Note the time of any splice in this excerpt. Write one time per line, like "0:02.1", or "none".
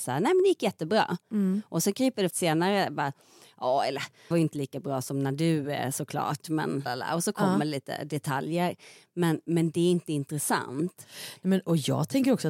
0:02.3
0:04.3
0:06.9

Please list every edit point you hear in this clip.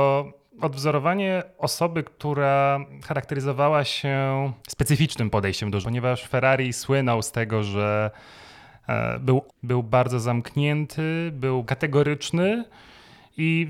0:04.6
0:05.8
0:09.5
0:11.6

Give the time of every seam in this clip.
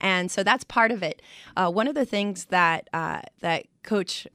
0:03.3

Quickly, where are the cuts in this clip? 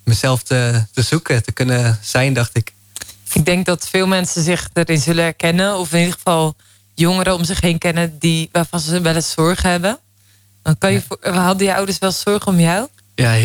none

